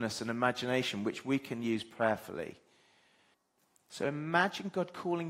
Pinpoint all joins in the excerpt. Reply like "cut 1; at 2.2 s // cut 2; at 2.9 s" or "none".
cut 1; at 3.3 s